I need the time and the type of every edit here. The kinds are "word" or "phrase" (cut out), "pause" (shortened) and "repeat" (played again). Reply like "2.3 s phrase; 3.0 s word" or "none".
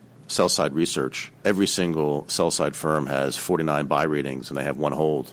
1.4 s word